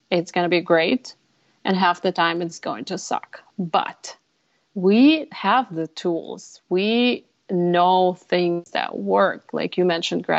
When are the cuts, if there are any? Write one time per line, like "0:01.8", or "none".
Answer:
none